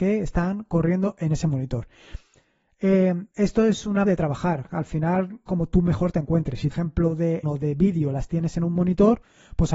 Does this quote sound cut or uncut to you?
cut